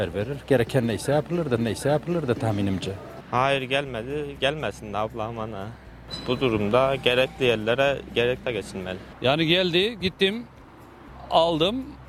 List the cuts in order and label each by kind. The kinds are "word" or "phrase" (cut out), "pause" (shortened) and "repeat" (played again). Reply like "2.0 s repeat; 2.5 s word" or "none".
1.6 s repeat; 8.4 s phrase